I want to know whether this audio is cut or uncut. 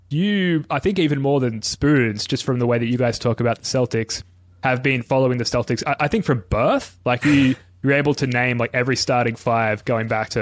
uncut